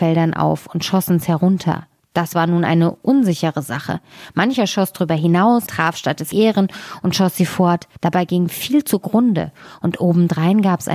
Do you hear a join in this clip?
yes; 4 cuts; at 2.0 s, 5.7 s, 6.3 s, 8.0 s

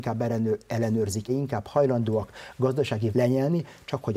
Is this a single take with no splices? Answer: no; 2 cuts; at 1.3 s, 3.1 s

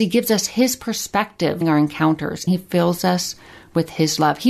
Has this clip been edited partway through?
yes; 2 cuts; at 1.6 s, 2.5 s

